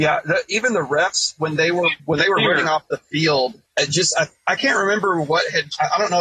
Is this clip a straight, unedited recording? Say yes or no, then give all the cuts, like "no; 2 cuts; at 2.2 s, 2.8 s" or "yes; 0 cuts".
no; 2 cuts; at 2.0 s, 3.7 s